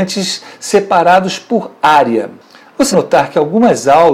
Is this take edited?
yes; 1 cut; at 2.9 s

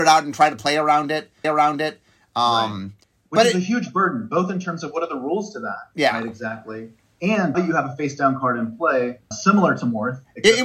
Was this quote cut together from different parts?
yes; 4 cuts; at 1.4 s, 3.0 s, 7.5 s, 9.3 s

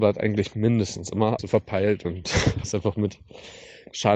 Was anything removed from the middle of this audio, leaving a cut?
yes; 2 cuts; at 1.4 s, 2.6 s

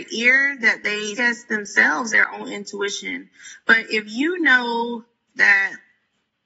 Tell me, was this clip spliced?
yes; 2 cuts; at 1.2 s, 2.1 s

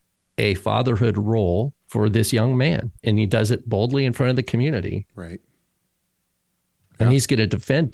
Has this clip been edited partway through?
yes; 3 cuts; at 1.8 s, 3.0 s, 5.1 s

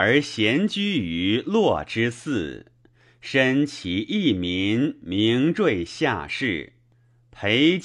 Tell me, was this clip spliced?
no; 0 cuts

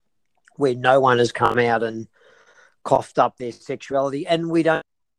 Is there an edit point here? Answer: no; 0 cuts

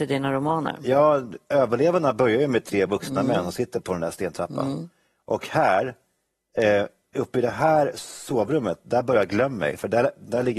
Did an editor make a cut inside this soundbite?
no; 0 cuts

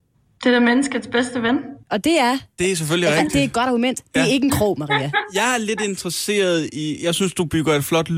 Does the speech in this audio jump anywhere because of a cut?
yes; 1 cut; at 1.8 s

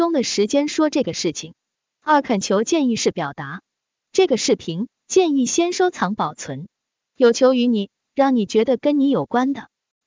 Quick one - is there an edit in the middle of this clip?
no; 0 cuts

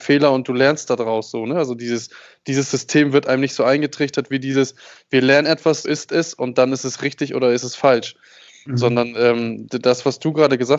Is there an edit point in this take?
yes; 1 cut; at 5.8 s

